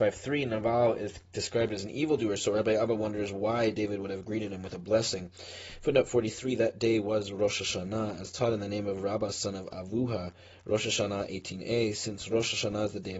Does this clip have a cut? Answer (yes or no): no